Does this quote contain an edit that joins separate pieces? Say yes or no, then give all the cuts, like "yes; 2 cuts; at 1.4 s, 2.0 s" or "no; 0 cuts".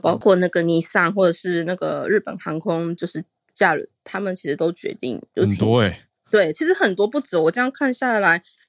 no; 0 cuts